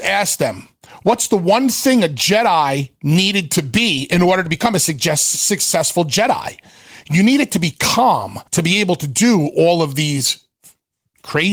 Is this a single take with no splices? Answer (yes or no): no